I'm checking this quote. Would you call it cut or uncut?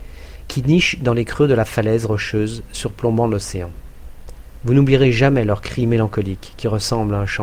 uncut